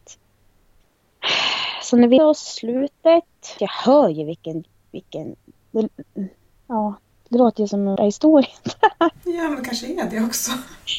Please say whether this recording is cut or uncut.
cut